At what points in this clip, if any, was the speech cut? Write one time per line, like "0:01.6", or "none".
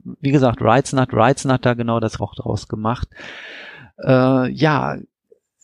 0:01.1
0:02.2